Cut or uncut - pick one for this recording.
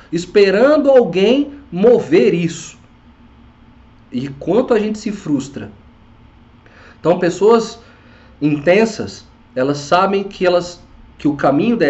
uncut